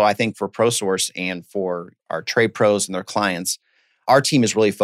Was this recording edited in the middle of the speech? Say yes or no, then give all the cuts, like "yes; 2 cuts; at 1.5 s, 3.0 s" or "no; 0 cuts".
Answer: no; 0 cuts